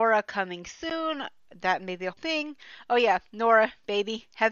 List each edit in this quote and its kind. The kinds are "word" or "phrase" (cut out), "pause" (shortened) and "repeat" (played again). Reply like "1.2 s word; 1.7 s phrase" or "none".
2.1 s word